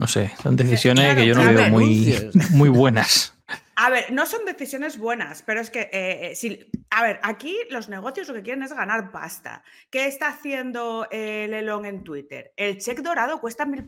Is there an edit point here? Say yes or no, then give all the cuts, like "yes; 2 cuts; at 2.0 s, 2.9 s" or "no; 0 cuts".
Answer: no; 0 cuts